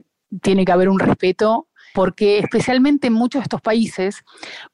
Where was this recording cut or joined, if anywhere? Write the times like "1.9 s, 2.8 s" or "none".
1.9 s